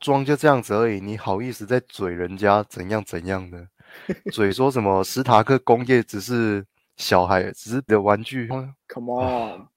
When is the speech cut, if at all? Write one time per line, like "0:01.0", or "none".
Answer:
0:07.9
0:08.5

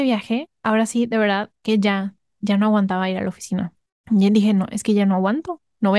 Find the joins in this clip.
0:03.9

